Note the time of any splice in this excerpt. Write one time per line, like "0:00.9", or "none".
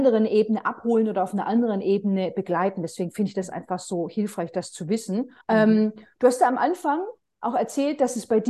0:05.4